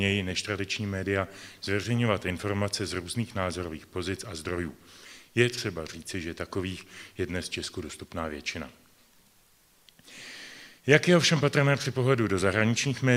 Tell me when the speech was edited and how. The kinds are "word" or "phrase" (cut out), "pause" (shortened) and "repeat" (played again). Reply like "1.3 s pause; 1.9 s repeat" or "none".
10.8 s pause